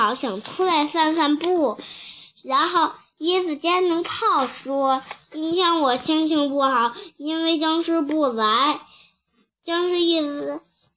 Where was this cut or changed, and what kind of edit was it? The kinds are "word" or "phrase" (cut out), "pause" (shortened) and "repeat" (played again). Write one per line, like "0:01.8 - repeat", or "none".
0:09.3 - pause